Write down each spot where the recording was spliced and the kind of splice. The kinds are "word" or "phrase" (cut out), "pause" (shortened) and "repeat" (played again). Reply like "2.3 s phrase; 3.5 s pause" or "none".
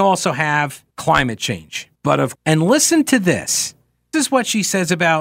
0.9 s pause; 2.0 s pause; 2.3 s word; 4.1 s word